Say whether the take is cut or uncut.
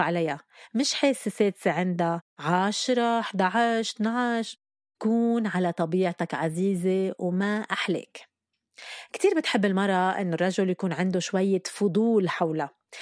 uncut